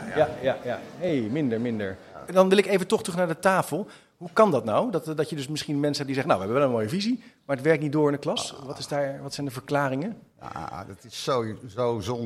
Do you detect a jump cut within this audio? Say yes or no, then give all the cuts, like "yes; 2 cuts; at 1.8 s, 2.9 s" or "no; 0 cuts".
no; 0 cuts